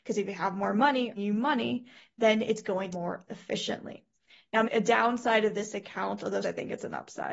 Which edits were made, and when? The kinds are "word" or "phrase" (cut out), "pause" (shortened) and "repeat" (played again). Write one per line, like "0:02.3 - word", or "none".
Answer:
0:01.2 - word
0:02.9 - phrase
0:04.6 - word
0:06.4 - word